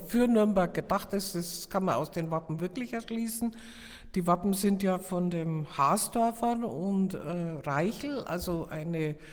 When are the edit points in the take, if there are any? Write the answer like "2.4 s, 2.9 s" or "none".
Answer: none